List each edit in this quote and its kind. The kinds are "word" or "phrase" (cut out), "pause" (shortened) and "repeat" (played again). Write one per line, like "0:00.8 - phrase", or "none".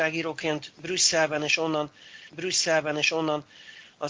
0:02.3 - repeat

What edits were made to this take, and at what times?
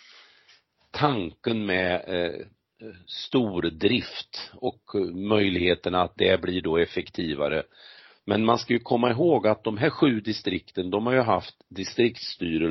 none

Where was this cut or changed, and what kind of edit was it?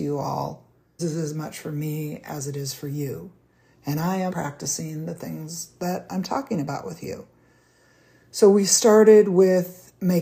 0:01.0 - word
0:04.3 - word

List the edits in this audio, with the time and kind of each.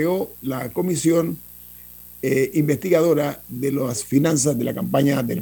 none

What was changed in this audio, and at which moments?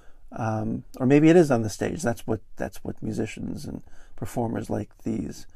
none

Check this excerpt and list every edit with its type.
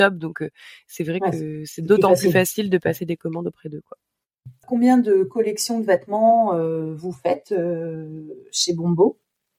none

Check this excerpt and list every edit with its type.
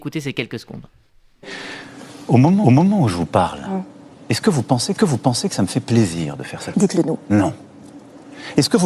0:02.6 - repeat
0:05.0 - repeat
0:06.7 - word

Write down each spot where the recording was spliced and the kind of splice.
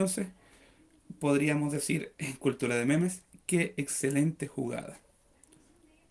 0:03.3 - pause

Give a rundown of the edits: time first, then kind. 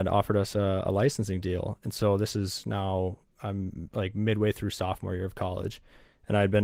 none

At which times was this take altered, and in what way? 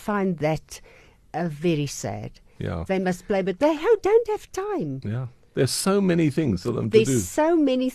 none

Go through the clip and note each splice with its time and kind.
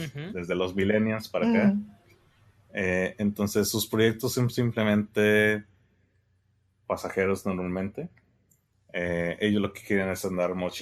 none

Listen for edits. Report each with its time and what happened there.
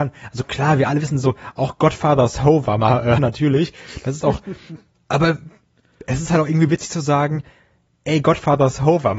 0:03.2 - word

